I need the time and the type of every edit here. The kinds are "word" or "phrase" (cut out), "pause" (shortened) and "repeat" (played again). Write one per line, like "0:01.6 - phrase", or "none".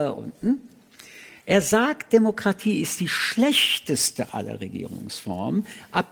none